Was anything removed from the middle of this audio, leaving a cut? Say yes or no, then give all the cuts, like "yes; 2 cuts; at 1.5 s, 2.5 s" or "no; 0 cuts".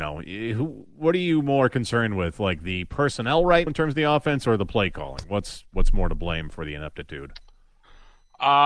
yes; 1 cut; at 3.7 s